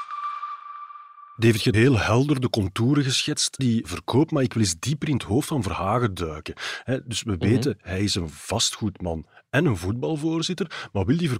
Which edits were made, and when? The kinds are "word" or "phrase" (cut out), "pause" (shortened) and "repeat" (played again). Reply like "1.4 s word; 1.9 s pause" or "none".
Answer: 1.7 s word; 3.6 s word